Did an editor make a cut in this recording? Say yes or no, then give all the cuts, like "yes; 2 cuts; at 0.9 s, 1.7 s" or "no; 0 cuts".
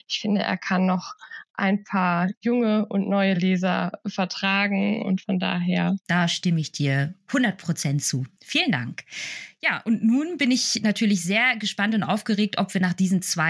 no; 0 cuts